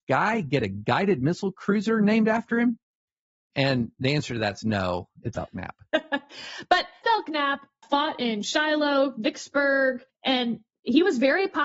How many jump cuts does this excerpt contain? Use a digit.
4